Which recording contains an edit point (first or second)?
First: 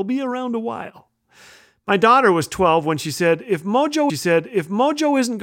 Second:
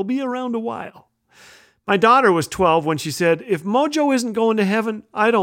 first